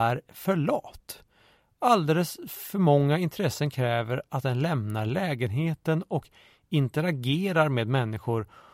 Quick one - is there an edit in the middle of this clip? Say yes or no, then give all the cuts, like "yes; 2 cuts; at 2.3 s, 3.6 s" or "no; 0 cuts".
no; 0 cuts